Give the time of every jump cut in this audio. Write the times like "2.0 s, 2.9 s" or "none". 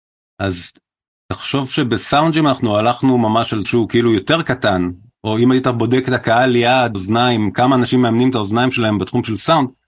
3.6 s, 6.9 s